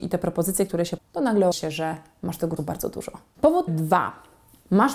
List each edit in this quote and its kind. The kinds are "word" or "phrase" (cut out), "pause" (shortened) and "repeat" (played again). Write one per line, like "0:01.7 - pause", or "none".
0:01.0 - word
0:01.5 - word
0:02.6 - word
0:03.7 - word